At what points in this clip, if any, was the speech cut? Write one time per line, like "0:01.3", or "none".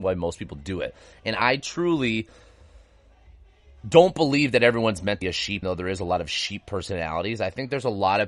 0:05.2
0:05.6